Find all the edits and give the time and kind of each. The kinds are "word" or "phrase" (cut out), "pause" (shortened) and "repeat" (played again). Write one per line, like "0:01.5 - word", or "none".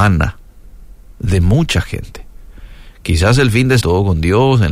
0:03.8 - word

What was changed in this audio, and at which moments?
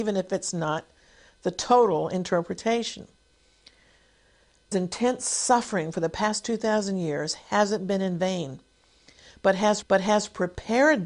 0:04.7 - phrase
0:09.8 - repeat

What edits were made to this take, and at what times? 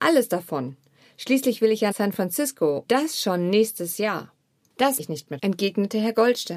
0:01.9 - word
0:02.9 - word
0:05.0 - word
0:05.4 - word

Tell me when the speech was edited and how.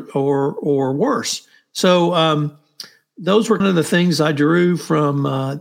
0:03.6 - word

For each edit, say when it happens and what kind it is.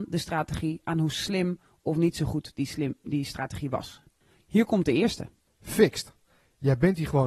none

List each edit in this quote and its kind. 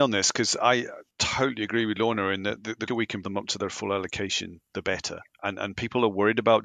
0:01.1 - pause
0:02.9 - word
0:03.2 - word
0:05.4 - word

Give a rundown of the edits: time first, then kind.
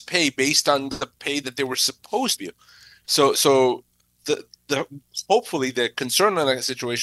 0:02.4 - phrase
0:04.6 - pause

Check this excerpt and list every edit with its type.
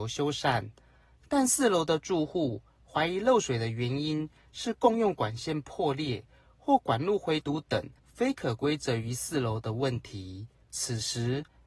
0:08.0 - pause
0:10.6 - pause

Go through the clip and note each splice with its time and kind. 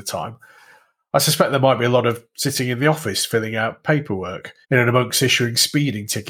0:04.6 - pause

